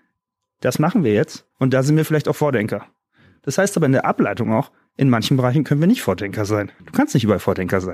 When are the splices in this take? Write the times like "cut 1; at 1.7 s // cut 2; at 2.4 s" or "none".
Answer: cut 1; at 1.5 s // cut 2; at 6.8 s